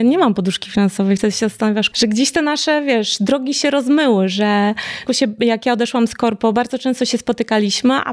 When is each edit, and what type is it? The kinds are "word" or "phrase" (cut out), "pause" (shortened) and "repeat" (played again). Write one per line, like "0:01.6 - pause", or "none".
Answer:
0:01.9 - word
0:05.1 - phrase

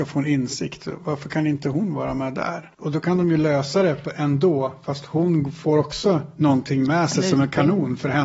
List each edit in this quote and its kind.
none

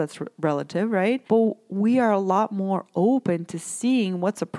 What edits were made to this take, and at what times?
0:01.3 - pause

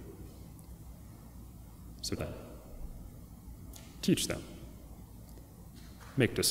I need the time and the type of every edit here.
0:02.2 - word

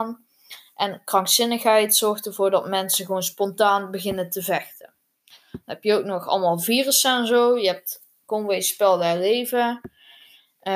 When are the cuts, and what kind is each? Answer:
none

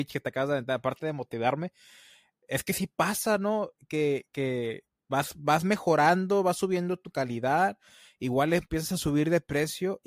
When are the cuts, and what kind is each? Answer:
none

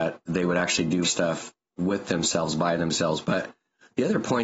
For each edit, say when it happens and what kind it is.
0:01.0 - word

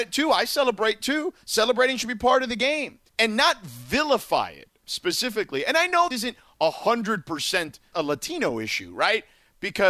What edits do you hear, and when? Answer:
0:03.1 - pause
0:06.1 - word
0:07.9 - word

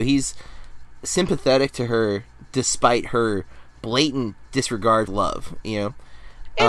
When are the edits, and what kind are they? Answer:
0:05.1 - phrase

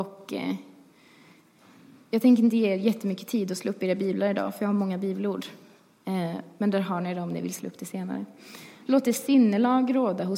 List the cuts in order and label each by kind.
none

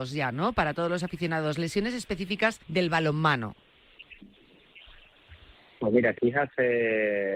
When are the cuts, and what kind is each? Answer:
0:02.6 - pause
0:05.6 - pause
0:06.2 - word

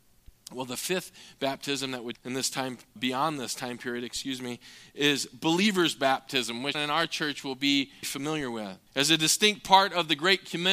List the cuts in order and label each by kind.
0:02.1 - phrase
0:03.0 - word
0:06.7 - word
0:08.0 - word
0:08.9 - pause

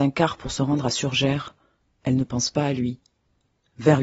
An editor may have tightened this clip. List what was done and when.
none

